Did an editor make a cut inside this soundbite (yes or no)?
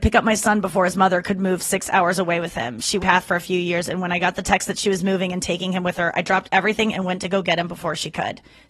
yes